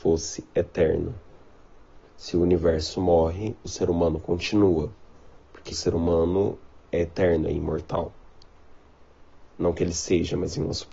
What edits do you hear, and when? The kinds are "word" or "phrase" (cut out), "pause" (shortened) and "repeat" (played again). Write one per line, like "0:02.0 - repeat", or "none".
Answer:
0:02.0 - pause
0:05.7 - word